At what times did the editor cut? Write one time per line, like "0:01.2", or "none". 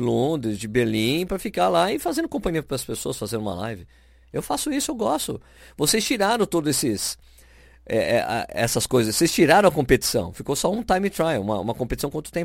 none